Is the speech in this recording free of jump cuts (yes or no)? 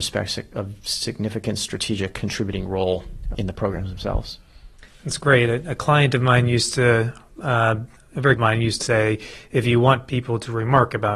no